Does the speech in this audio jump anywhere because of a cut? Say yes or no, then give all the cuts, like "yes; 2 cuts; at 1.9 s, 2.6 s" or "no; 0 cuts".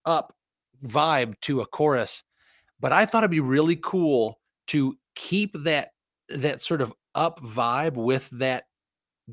no; 0 cuts